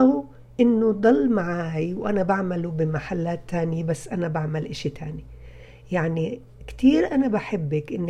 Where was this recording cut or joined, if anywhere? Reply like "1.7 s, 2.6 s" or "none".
none